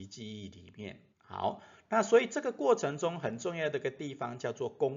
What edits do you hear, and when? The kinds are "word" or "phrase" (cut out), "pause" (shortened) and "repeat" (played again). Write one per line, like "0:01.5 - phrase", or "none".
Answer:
0:01.1 - pause